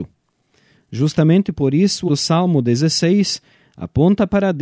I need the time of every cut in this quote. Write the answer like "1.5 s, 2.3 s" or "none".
2.1 s